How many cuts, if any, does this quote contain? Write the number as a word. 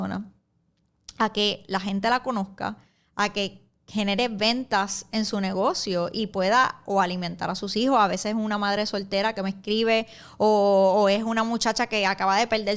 zero